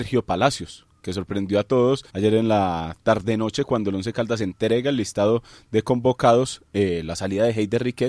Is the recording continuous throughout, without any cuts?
no; 1 cut; at 2.1 s

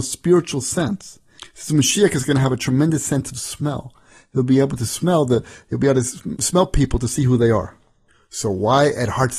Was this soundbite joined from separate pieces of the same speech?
no; 0 cuts

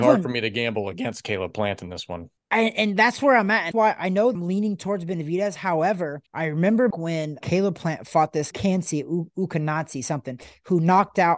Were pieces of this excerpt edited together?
yes; 7 cuts; at 2.4 s, 3.7 s, 4.3 s, 6.3 s, 6.9 s, 7.4 s, 8.5 s

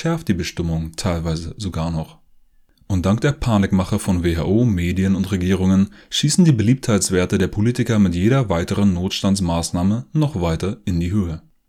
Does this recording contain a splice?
no; 0 cuts

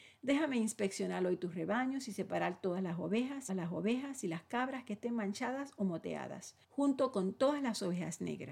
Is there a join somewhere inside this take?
yes; 2 cuts; at 3.5 s, 6.6 s

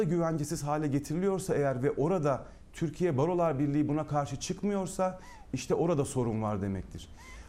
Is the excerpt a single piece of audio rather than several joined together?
yes; 0 cuts

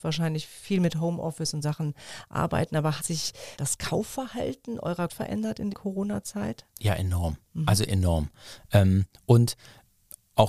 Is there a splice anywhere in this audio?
yes; 5 cuts; at 1.6 s, 3.0 s, 3.5 s, 5.1 s, 5.7 s

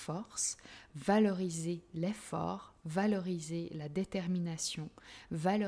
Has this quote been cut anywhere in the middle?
no; 0 cuts

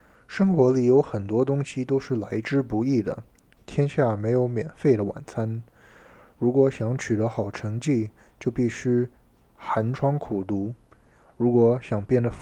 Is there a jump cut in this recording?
no; 0 cuts

